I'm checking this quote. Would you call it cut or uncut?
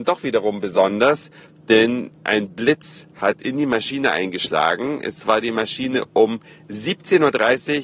uncut